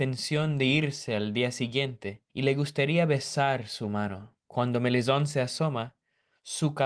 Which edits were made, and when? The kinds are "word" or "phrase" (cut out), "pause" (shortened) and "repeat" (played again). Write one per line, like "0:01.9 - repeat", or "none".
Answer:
0:02.3 - pause
0:04.4 - pause